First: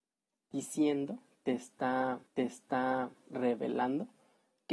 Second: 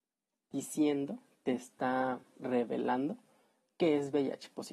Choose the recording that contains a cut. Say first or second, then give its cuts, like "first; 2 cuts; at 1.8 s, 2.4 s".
first; 1 cut; at 2.3 s